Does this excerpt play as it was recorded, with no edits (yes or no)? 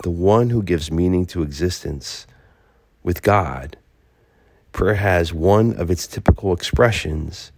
yes